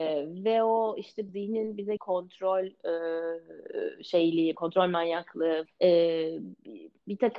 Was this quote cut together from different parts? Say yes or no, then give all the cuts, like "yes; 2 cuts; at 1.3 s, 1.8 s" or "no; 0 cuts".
yes; 4 cuts; at 1.3 s, 2.0 s, 4.5 s, 5.7 s